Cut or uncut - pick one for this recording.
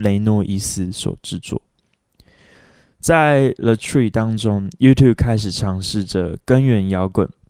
cut